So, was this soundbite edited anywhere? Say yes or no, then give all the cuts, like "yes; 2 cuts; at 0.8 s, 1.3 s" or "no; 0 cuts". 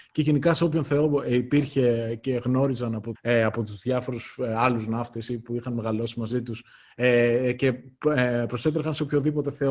yes; 1 cut; at 3.1 s